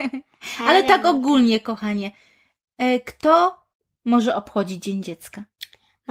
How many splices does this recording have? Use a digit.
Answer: 1